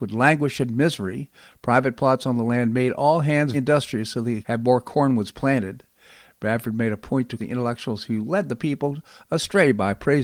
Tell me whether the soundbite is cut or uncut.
cut